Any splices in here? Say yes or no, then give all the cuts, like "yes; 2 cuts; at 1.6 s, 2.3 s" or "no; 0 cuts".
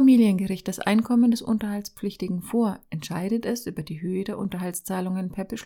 no; 0 cuts